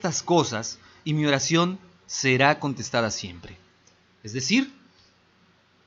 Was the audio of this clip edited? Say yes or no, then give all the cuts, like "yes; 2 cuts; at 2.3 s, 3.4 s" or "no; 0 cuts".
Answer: no; 0 cuts